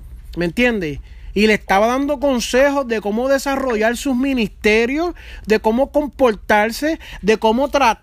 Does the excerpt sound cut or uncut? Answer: uncut